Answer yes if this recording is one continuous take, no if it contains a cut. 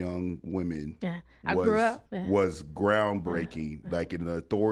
no